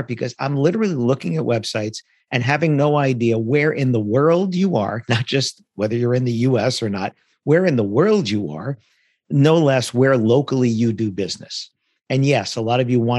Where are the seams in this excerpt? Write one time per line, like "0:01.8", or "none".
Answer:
none